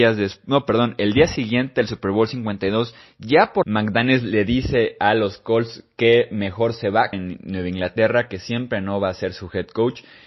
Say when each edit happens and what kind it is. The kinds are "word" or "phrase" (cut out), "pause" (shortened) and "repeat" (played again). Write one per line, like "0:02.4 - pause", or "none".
0:03.6 - phrase
0:07.1 - word